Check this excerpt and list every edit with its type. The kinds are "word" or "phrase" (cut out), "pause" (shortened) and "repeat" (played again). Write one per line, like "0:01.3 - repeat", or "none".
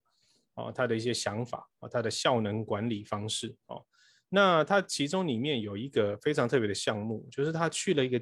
none